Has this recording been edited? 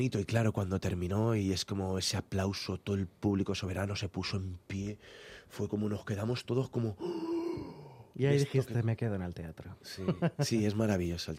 no; 0 cuts

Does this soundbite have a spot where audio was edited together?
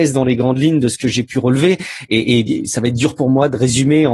no; 0 cuts

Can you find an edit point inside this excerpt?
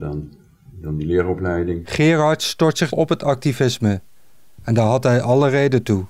yes; 1 cut; at 2.9 s

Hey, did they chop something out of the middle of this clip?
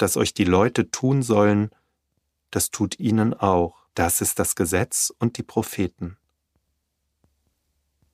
yes; 2 cuts; at 3.0 s, 3.9 s

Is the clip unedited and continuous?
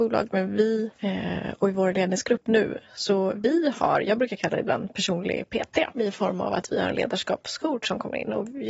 no; 2 cuts; at 0.9 s, 5.9 s

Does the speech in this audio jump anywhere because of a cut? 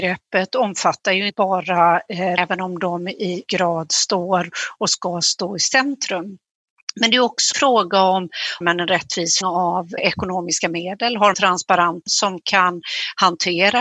yes; 9 cuts; at 1.3 s, 2.4 s, 3.5 s, 7.5 s, 8.6 s, 9.4 s, 10.0 s, 11.3 s, 12.1 s

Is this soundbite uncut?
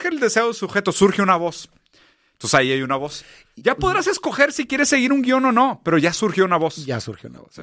yes; 0 cuts

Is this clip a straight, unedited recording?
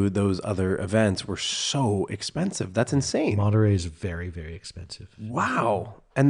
yes; 0 cuts

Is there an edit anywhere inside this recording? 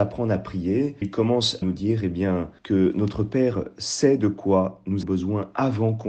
yes; 4 cuts; at 1.0 s, 1.6 s, 2.6 s, 5.0 s

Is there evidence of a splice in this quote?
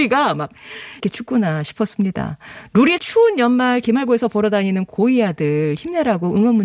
yes; 2 cuts; at 1.0 s, 3.0 s

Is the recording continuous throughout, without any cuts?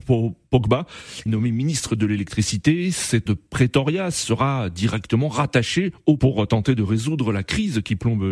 no; 3 cuts; at 1.3 s, 3.3 s, 6.2 s

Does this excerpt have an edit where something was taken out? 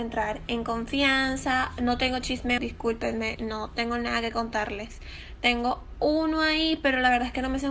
yes; 1 cut; at 2.6 s

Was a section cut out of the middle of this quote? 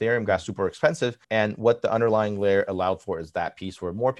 yes; 1 cut; at 1.2 s

